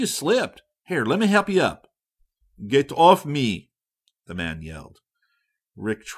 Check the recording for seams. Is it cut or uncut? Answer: uncut